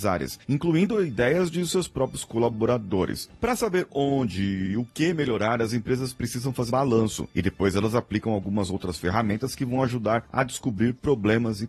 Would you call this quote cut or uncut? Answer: cut